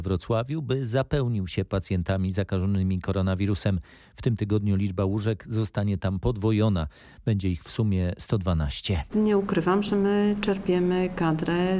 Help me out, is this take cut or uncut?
uncut